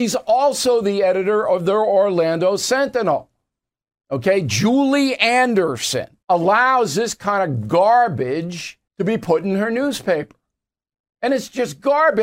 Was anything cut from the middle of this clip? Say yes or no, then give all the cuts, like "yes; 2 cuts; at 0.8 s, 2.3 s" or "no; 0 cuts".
yes; 2 cuts; at 6.2 s, 8.9 s